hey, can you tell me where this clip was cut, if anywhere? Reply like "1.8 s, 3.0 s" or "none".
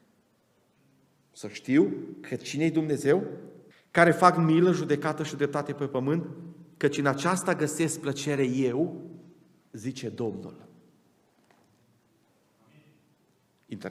3.7 s